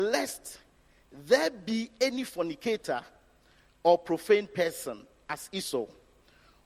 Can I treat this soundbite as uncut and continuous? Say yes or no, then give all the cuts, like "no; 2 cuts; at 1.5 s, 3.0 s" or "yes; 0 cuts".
yes; 0 cuts